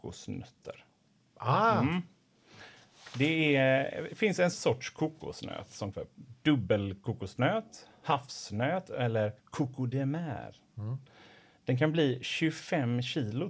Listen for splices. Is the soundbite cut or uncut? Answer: cut